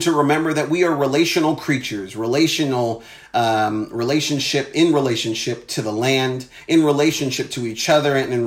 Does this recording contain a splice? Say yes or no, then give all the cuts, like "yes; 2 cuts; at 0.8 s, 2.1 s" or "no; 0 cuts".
no; 0 cuts